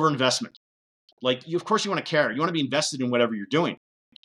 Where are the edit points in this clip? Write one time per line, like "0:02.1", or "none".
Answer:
none